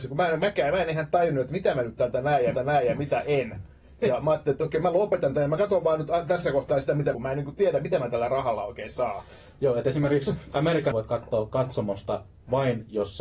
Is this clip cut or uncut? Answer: cut